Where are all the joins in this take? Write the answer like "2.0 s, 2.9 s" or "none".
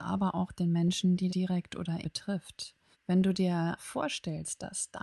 1.3 s, 2.0 s, 2.9 s, 3.8 s